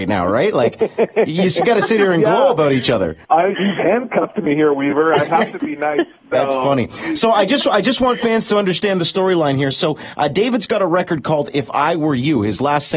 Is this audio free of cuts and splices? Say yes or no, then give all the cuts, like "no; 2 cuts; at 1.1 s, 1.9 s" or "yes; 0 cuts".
no; 1 cut; at 3.2 s